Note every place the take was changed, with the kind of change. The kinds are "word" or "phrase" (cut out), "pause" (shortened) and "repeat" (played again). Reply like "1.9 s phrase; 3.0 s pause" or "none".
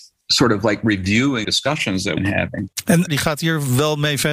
1.4 s word; 2.2 s phrase; 3.1 s phrase